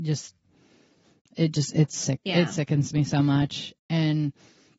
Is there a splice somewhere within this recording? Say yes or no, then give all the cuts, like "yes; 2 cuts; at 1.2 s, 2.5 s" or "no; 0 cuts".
no; 0 cuts